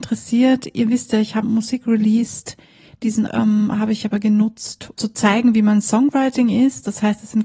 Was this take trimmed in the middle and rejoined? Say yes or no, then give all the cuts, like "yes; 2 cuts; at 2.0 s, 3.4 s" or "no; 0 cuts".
yes; 3 cuts; at 1.4 s, 3.3 s, 4.9 s